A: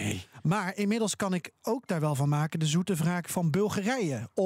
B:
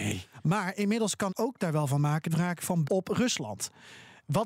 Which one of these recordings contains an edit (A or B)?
B